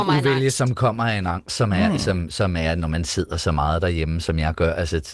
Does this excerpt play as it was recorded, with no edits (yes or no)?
yes